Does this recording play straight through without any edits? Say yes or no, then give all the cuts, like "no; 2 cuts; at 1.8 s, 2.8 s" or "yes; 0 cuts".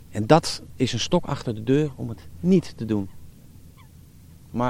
yes; 0 cuts